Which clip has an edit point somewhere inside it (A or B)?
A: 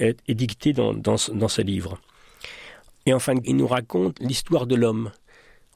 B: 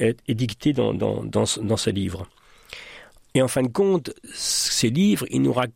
A